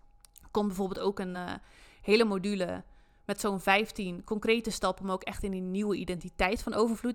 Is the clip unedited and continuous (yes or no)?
yes